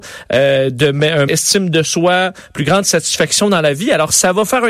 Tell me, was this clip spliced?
yes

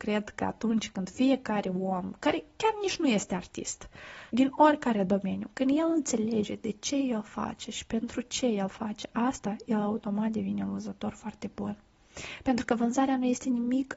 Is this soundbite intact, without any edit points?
no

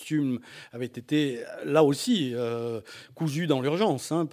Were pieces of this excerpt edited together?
no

